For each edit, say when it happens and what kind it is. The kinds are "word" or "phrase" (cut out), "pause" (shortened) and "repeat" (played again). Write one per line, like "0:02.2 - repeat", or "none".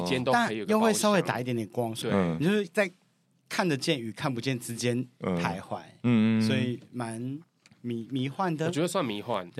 0:02.0 - word